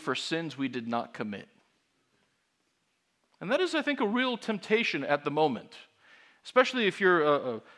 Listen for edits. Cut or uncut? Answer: uncut